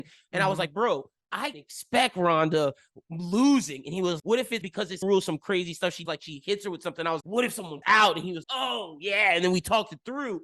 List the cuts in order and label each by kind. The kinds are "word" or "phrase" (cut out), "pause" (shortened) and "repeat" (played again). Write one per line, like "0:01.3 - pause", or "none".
0:01.5 - word
0:04.2 - word
0:04.6 - word
0:05.0 - word
0:06.1 - word
0:07.2 - word
0:07.8 - word
0:08.4 - word